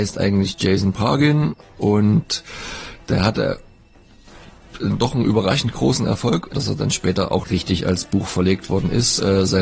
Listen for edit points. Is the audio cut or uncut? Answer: cut